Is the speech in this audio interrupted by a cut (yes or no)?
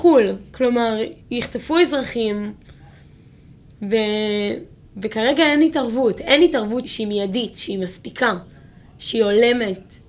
yes